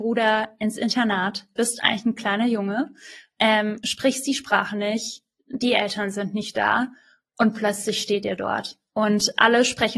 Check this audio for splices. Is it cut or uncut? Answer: uncut